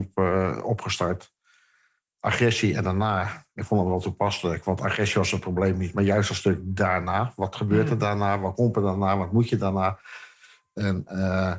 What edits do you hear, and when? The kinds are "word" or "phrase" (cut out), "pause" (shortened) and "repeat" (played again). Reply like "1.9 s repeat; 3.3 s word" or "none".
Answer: none